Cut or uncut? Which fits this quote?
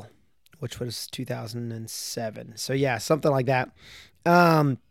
uncut